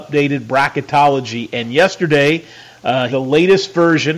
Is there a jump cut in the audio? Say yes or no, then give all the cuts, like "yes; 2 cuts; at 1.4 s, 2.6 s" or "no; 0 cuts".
yes; 1 cut; at 3.1 s